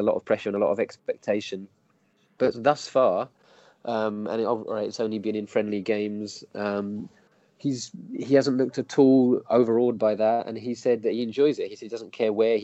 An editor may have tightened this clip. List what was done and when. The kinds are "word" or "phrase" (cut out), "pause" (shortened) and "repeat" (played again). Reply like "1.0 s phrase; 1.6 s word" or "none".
none